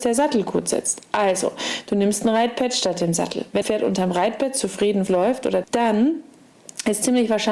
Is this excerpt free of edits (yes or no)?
no